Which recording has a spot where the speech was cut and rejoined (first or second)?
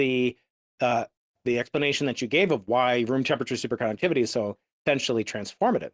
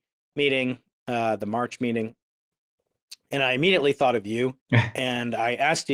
second